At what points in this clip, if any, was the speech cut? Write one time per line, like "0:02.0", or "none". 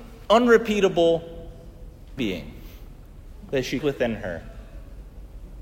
0:02.2
0:03.8